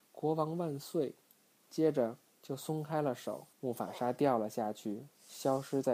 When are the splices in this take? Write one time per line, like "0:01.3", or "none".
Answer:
0:03.5